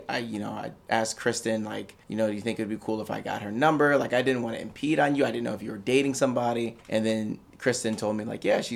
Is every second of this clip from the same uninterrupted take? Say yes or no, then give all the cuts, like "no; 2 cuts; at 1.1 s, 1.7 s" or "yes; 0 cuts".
no; 2 cuts; at 2.0 s, 6.8 s